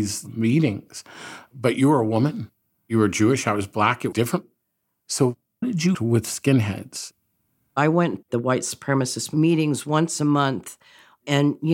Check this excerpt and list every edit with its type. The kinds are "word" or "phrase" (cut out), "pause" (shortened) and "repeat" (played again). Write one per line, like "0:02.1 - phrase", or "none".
0:04.1 - word
0:05.6 - word
0:05.9 - word
0:08.2 - word